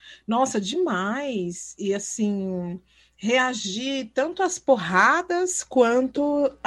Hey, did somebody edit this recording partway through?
no; 0 cuts

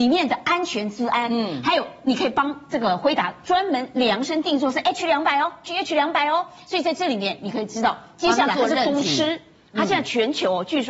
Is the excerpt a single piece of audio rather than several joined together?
yes; 0 cuts

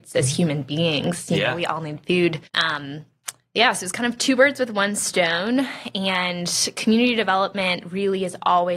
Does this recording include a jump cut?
yes; 1 cut; at 2.5 s

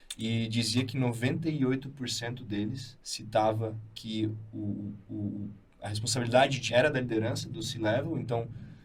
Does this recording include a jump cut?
yes; 3 cuts; at 3.0 s, 5.1 s, 6.7 s

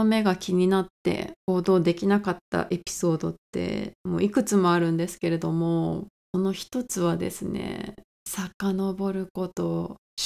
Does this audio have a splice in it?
yes; 2 cuts; at 1.4 s, 4.0 s

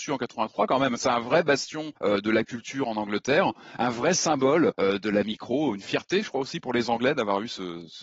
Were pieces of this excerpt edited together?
yes; 2 cuts; at 2.0 s, 4.7 s

